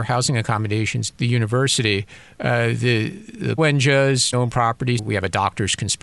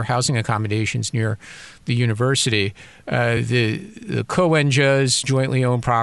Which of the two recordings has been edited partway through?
first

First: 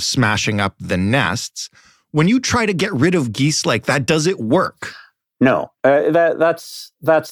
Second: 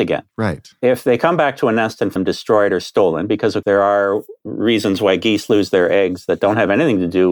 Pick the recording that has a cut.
second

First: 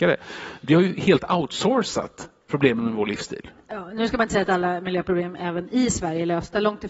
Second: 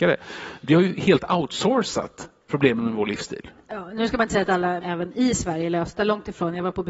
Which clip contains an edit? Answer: second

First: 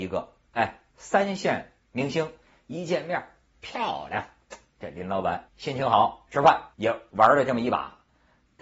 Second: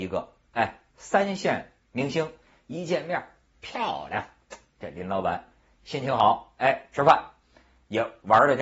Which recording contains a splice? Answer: first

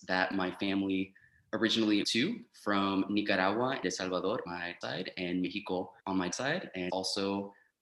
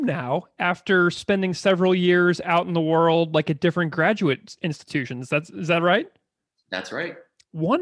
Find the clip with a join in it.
first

